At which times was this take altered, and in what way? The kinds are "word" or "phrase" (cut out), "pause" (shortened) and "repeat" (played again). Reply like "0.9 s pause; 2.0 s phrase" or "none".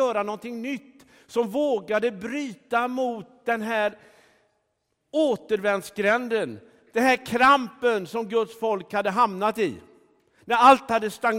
none